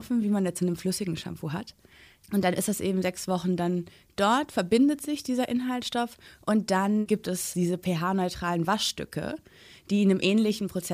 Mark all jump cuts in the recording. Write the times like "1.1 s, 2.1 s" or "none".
none